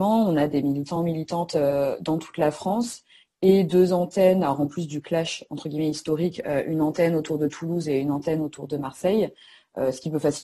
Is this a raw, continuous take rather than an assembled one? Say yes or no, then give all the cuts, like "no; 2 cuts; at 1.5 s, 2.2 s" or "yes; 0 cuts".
yes; 0 cuts